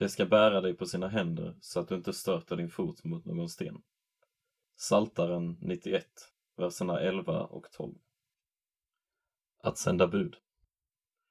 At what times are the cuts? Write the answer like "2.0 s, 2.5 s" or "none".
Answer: none